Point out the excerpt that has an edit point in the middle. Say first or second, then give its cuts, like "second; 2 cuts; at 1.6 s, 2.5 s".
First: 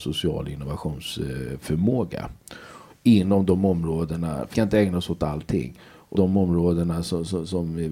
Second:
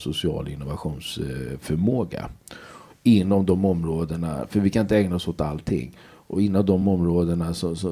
first; 2 cuts; at 4.5 s, 6.1 s